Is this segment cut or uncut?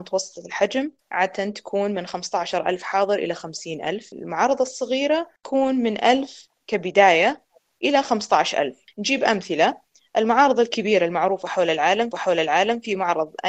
cut